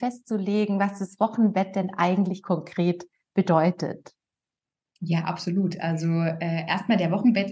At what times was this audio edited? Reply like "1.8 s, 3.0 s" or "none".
none